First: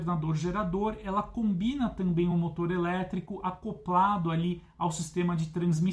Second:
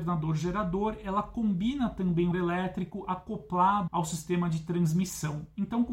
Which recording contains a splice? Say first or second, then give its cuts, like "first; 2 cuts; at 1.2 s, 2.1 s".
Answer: second; 2 cuts; at 2.3 s, 3.9 s